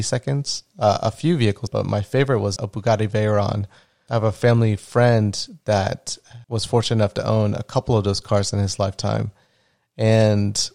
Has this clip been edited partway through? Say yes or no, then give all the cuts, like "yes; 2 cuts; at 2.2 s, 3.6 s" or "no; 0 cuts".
yes; 4 cuts; at 1.7 s, 2.6 s, 4.1 s, 6.4 s